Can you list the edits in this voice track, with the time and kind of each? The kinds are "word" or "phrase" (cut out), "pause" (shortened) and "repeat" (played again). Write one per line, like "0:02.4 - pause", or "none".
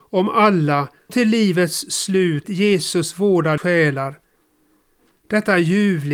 0:01.1 - word
0:02.4 - word
0:03.6 - word